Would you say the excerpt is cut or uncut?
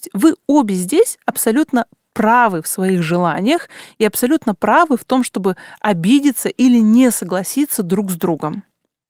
uncut